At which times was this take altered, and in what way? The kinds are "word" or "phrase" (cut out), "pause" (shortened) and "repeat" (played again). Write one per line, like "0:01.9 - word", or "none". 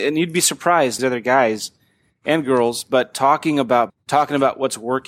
0:01.0 - phrase
0:03.9 - word